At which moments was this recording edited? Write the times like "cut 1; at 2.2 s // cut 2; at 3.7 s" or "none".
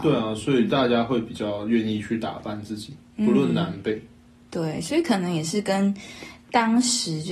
none